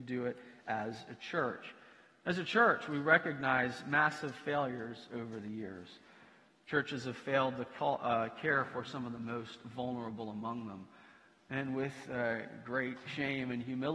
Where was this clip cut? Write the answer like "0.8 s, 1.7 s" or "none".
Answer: none